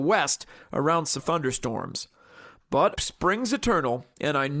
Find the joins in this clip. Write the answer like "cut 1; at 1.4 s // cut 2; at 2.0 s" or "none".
cut 1; at 1.2 s // cut 2; at 2.9 s